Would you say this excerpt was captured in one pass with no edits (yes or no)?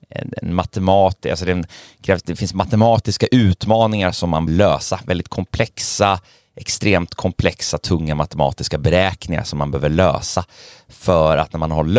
no